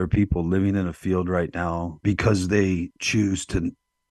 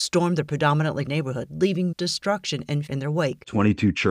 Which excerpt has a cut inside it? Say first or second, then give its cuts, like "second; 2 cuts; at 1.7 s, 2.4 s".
second; 3 cuts; at 1.1 s, 1.9 s, 2.9 s